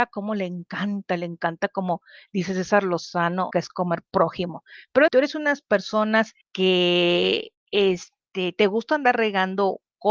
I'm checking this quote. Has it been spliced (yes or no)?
yes